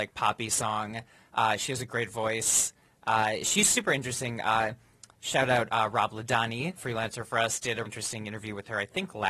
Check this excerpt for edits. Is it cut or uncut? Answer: cut